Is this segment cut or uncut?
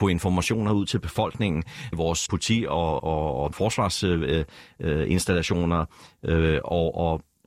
cut